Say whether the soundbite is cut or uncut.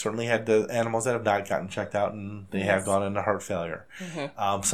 uncut